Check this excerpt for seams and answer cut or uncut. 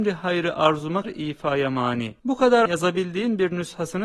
cut